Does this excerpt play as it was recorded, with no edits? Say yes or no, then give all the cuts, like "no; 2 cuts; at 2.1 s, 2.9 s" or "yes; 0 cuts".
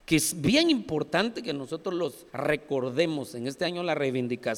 no; 1 cut; at 2.3 s